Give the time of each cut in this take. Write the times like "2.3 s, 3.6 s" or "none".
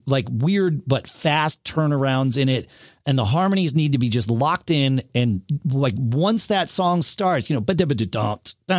none